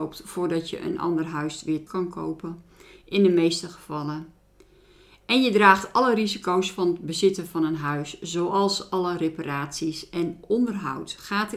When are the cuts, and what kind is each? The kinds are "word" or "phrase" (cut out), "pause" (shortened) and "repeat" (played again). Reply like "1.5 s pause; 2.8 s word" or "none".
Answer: 1.9 s word